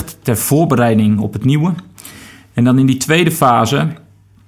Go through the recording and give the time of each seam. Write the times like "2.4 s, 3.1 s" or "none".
none